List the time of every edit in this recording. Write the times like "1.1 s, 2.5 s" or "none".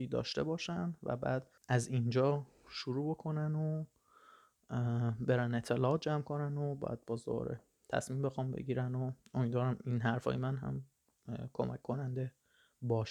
1.6 s